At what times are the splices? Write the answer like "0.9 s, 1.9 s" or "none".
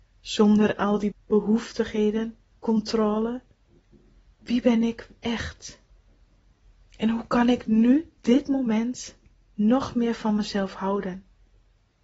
1.1 s, 8.2 s